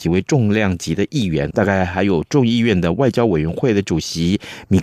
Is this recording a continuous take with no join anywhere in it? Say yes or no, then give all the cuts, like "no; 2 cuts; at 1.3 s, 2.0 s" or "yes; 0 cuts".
no; 1 cut; at 1.5 s